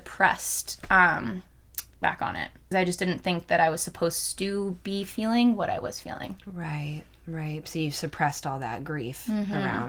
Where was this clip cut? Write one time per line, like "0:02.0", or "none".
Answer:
0:02.0
0:02.7